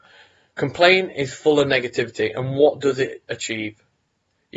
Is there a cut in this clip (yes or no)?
no